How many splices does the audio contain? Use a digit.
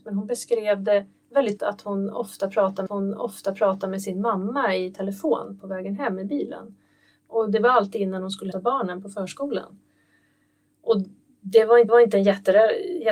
4